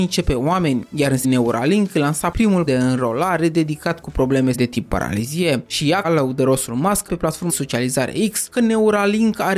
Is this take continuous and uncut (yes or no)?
no